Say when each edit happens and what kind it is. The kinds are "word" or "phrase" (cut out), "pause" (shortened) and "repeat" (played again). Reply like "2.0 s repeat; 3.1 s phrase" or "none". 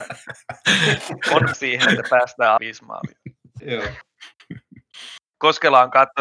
1.5 s word; 2.6 s word; 5.3 s pause